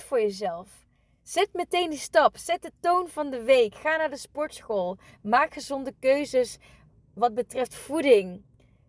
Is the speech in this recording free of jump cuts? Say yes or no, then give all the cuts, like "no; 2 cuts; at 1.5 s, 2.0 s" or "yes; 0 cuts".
yes; 0 cuts